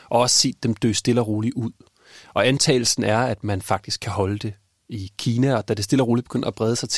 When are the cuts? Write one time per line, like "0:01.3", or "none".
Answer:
none